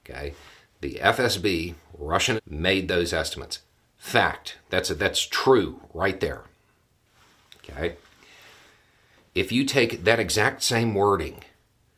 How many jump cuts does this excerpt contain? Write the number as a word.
one